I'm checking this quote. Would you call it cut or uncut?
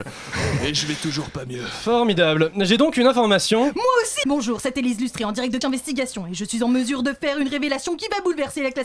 cut